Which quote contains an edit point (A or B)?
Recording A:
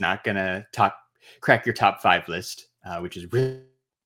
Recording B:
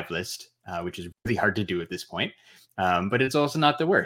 B